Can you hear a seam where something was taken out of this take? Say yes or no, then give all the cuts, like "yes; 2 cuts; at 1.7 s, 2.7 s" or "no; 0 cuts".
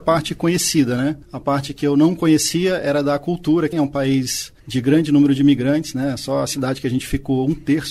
yes; 1 cut; at 3.7 s